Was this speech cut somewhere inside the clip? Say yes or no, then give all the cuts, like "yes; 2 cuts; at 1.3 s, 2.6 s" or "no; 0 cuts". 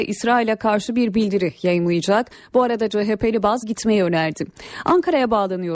yes; 1 cut; at 3.6 s